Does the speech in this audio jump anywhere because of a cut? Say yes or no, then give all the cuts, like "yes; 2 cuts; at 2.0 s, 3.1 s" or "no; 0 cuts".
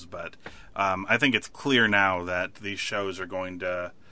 no; 0 cuts